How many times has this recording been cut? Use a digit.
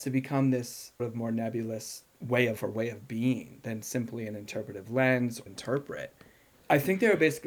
4